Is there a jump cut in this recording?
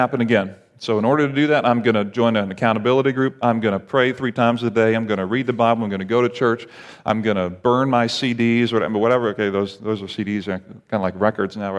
no; 0 cuts

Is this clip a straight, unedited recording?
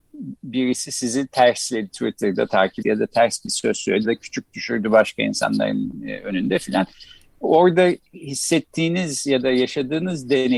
no; 4 cuts; at 1.9 s, 2.8 s, 4.0 s, 8.1 s

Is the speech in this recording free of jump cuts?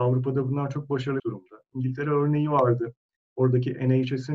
no; 1 cut; at 1.2 s

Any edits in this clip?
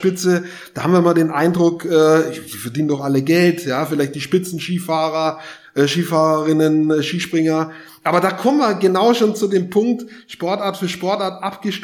no; 0 cuts

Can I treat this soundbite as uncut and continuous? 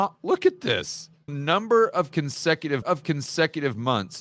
no; 2 cuts; at 1.3 s, 2.8 s

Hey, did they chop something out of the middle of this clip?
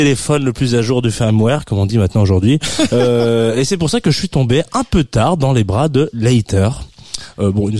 no; 0 cuts

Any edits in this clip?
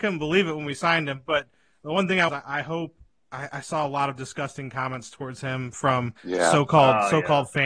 yes; 2 cuts; at 2.3 s, 6.2 s

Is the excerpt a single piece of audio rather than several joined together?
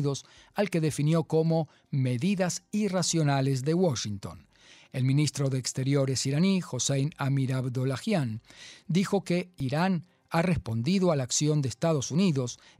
yes; 0 cuts

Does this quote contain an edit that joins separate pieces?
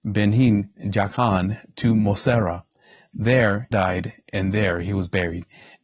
yes; 1 cut; at 3.7 s

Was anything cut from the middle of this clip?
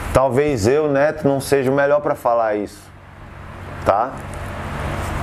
no; 0 cuts

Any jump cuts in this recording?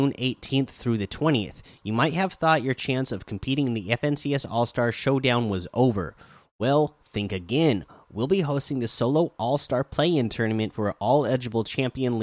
no; 0 cuts

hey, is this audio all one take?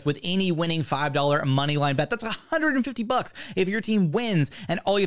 yes; 0 cuts

